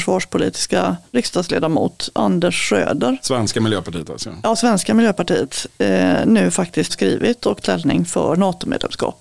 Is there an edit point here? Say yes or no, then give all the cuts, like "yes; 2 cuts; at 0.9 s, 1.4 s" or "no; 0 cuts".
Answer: yes; 3 cuts; at 1.1 s, 6.9 s, 7.6 s